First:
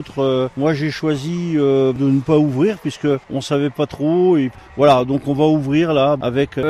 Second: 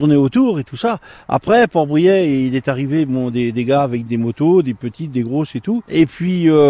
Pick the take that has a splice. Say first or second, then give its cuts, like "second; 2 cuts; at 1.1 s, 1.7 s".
first; 1 cut; at 3.2 s